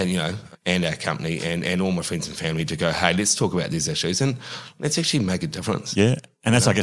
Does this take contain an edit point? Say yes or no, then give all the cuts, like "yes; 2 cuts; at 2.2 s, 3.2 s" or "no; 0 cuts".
no; 0 cuts